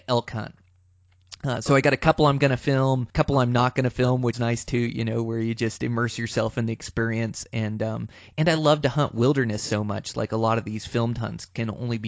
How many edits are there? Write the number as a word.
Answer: two